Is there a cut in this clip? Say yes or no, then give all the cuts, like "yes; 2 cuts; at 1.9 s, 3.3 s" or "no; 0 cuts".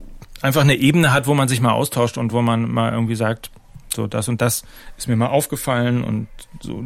no; 0 cuts